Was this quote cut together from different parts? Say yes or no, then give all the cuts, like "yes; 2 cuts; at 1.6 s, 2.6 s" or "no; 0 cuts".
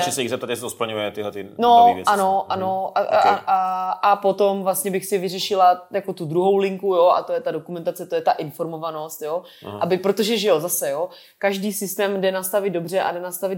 no; 0 cuts